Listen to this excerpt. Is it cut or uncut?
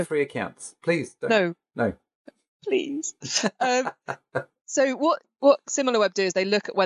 uncut